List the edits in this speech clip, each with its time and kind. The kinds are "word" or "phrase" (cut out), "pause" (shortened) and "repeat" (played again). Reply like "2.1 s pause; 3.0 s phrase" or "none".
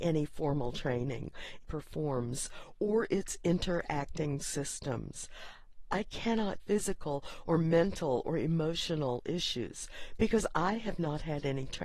1.6 s phrase; 6.6 s phrase